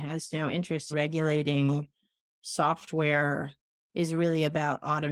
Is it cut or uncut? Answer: cut